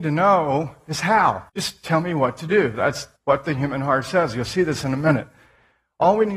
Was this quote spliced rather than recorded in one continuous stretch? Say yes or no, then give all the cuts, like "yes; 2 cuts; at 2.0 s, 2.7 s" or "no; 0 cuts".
yes; 2 cuts; at 1.5 s, 3.2 s